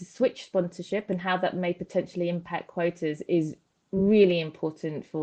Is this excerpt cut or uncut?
uncut